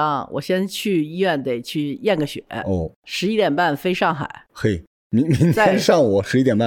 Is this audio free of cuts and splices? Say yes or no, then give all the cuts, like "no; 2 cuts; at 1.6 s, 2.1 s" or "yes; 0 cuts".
no; 1 cut; at 3.0 s